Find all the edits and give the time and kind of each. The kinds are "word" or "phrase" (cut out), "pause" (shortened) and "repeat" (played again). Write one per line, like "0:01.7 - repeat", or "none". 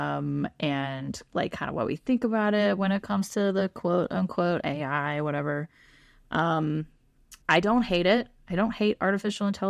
0:07.4 - pause